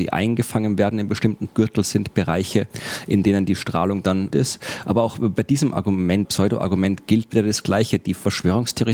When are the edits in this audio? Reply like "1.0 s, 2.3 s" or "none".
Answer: 1.5 s, 4.3 s, 6.3 s